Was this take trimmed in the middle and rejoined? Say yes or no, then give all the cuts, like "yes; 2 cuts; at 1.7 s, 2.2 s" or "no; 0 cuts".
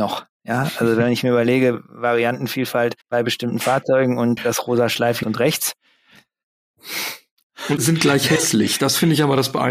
yes; 4 cuts; at 3.0 s, 4.4 s, 5.2 s, 7.8 s